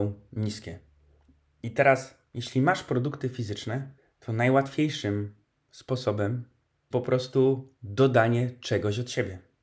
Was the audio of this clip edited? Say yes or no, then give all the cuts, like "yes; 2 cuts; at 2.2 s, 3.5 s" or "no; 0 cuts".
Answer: yes; 3 cuts; at 4.0 s, 6.9 s, 7.8 s